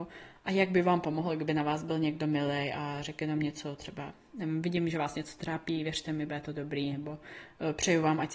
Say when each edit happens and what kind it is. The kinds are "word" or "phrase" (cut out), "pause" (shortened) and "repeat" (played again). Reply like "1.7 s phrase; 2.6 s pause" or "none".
none